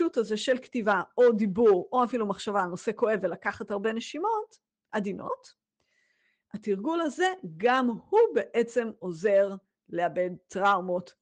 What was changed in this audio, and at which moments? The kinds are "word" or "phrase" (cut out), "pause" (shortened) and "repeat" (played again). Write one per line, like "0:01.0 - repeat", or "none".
none

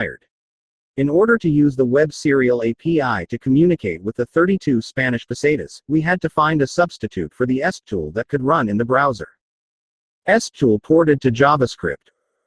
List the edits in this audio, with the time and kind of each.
0:09.9 - pause

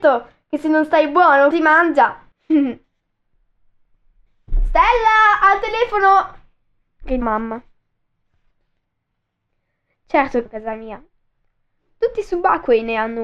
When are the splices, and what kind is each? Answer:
0:01.5 - word
0:02.3 - pause
0:07.2 - word
0:10.5 - phrase

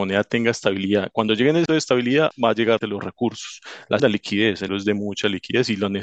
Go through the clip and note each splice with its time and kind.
0:01.7 - word
0:02.3 - word
0:02.8 - word
0:04.0 - word
0:04.7 - word

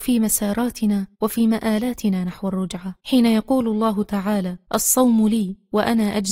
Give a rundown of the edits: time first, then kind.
0:01.1 - pause
0:03.0 - pause
0:04.6 - pause

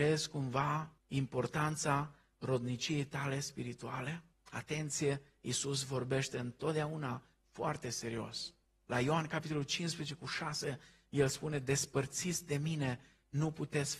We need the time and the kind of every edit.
0:01.0 - pause
0:04.3 - pause
0:08.7 - pause

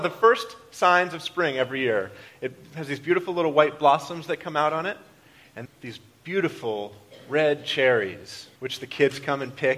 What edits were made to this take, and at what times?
0:05.6 - word
0:08.6 - pause

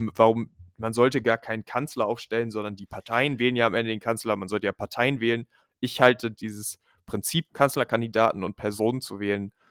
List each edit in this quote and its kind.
none

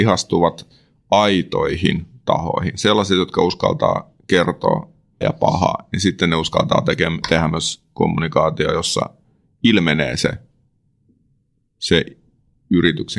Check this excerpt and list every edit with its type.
0:05.2 - word

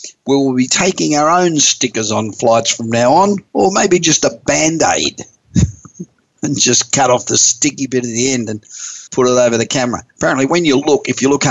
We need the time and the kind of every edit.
0:03.5 - pause
0:09.1 - pause

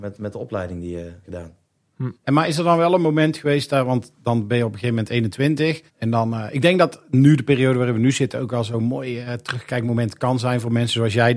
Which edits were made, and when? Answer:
0:01.2 - phrase
0:02.1 - pause
0:05.9 - pause
0:09.3 - word

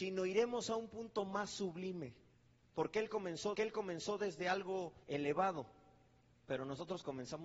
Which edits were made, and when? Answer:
0:02.3 - pause
0:03.5 - repeat
0:05.0 - pause

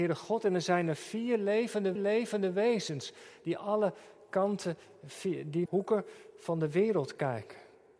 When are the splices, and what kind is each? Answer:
0:02.0 - repeat
0:05.7 - phrase

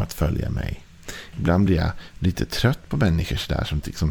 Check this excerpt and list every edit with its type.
none

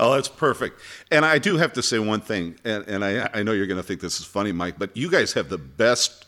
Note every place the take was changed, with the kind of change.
none

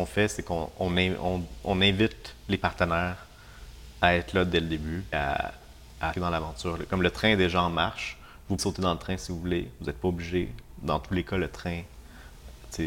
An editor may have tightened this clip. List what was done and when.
0:05.1 - word
0:06.1 - word
0:08.6 - word

